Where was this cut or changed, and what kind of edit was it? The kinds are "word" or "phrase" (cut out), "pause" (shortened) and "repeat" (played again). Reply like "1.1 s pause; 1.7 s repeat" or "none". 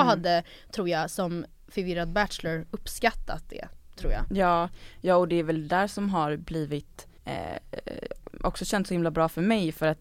7.2 s pause

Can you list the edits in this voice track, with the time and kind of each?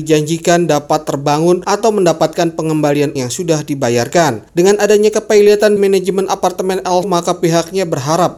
3.2 s word; 5.8 s word; 7.0 s word

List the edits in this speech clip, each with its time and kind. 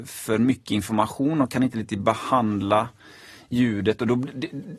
none

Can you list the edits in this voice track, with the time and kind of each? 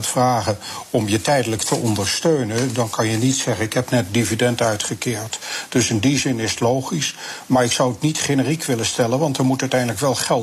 none

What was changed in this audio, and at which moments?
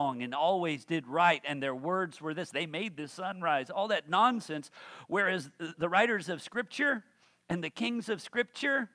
5.7 s word

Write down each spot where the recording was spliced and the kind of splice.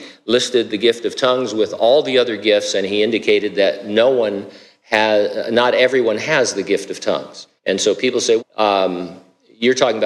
7.6 s pause; 8.4 s word

